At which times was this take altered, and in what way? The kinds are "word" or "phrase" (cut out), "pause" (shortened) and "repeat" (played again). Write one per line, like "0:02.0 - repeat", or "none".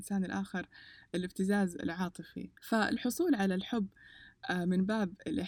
0:02.6 - pause